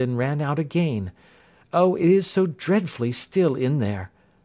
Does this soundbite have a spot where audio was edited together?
no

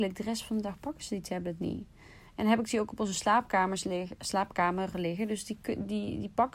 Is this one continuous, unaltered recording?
yes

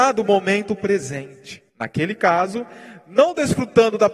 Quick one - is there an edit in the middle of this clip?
yes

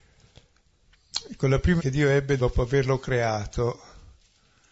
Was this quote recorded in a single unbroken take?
no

